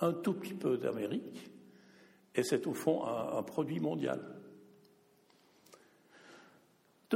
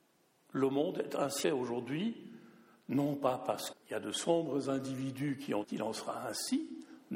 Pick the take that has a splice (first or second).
second